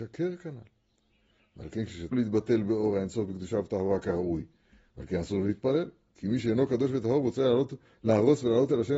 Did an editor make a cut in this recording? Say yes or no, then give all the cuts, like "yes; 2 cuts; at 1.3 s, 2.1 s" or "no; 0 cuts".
yes; 1 cut; at 2.1 s